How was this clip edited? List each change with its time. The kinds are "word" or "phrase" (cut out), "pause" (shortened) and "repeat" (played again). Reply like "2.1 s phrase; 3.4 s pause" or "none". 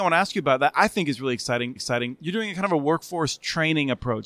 1.8 s repeat